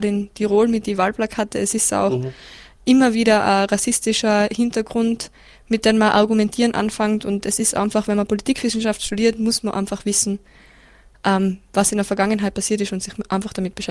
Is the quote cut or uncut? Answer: uncut